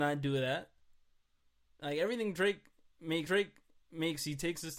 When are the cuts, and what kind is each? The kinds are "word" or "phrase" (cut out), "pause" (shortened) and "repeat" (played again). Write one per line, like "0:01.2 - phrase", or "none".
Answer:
0:03.3 - repeat